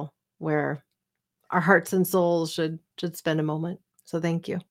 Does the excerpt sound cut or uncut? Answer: uncut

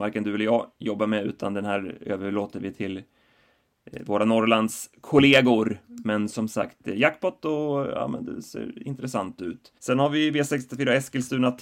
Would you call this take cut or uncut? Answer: cut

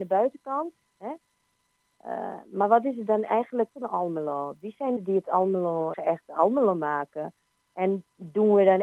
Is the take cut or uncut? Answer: cut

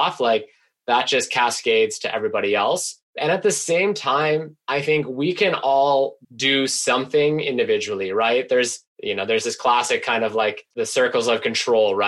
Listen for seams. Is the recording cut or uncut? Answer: cut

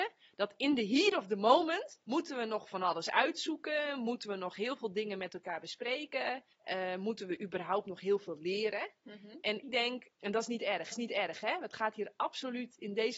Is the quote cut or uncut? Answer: cut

